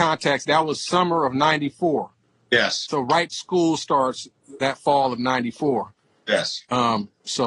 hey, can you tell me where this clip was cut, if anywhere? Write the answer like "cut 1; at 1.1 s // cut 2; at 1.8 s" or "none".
cut 1; at 3.3 s // cut 2; at 4.6 s